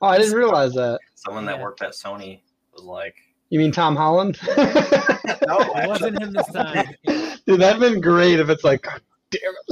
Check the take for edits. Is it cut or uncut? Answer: uncut